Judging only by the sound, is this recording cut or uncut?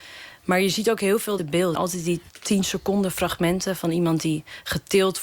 cut